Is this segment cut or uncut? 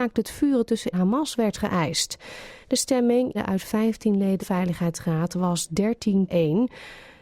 cut